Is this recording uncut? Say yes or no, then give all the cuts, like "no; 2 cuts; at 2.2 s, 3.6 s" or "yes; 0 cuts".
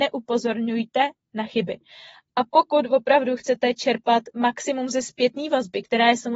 yes; 0 cuts